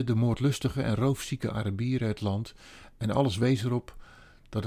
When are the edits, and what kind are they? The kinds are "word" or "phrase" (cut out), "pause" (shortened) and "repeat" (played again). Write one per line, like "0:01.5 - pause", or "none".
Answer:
none